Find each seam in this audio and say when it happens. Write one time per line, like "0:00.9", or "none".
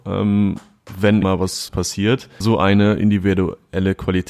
0:01.2
0:01.7
0:02.4